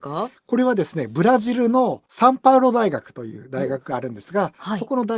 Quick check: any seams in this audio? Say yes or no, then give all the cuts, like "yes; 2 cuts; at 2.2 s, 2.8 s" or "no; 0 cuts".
yes; 1 cut; at 2.1 s